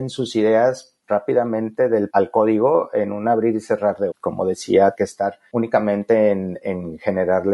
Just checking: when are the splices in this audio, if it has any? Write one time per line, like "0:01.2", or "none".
0:01.0
0:02.1
0:04.1
0:04.9
0:05.5